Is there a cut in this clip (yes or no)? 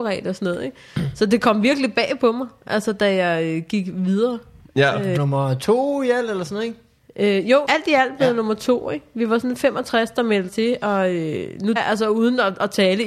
yes